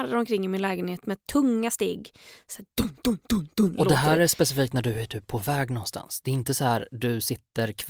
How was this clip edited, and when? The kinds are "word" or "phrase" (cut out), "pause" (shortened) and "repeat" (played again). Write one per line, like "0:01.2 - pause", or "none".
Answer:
none